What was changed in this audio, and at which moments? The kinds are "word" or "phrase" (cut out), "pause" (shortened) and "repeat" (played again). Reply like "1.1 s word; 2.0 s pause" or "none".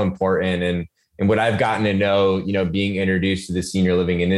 none